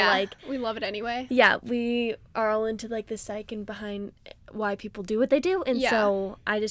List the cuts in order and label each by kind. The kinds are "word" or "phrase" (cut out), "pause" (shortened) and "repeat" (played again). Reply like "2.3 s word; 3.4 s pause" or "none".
none